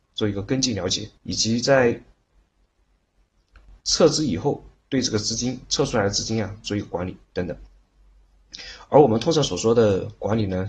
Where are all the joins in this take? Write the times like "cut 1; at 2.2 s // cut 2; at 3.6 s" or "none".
cut 1; at 1.2 s // cut 2; at 4.8 s